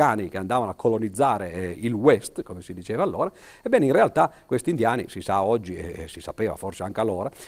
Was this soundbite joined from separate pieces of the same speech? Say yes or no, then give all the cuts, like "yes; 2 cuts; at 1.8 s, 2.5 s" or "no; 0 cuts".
no; 0 cuts